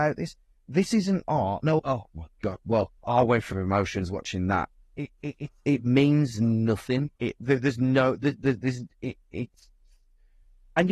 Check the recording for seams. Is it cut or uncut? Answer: cut